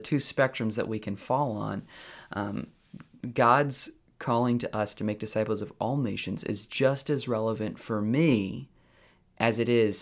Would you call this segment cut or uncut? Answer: uncut